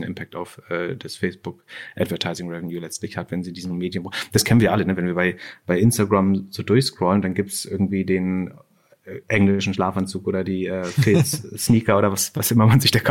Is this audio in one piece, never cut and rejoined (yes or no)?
yes